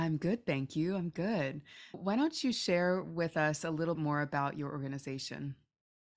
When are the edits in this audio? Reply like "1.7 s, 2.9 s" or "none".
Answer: 1.9 s, 3.9 s